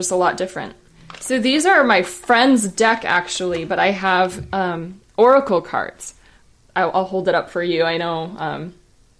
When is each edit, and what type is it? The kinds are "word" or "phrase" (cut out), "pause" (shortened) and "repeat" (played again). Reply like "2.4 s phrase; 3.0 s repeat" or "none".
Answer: none